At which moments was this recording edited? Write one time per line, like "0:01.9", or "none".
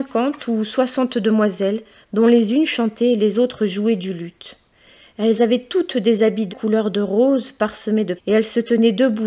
0:06.5
0:08.2